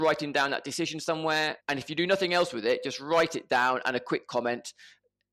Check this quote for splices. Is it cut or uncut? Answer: cut